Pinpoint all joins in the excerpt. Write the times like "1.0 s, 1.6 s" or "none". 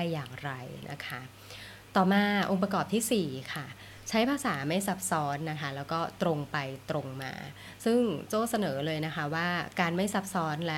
none